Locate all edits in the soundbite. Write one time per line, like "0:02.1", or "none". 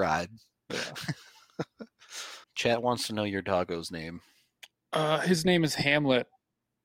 0:02.4